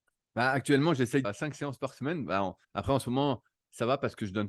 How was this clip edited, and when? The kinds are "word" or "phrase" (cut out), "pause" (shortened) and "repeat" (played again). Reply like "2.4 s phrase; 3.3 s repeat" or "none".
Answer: 1.2 s phrase; 2.6 s pause